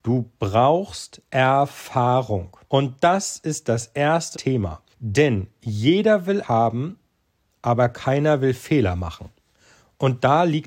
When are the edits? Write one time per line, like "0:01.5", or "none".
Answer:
0:02.6
0:04.3
0:04.9
0:06.4